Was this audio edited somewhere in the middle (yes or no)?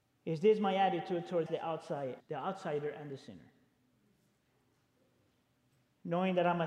yes